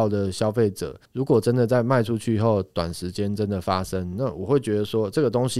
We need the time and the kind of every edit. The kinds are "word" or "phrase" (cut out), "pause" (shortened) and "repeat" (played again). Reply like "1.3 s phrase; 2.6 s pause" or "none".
1.0 s pause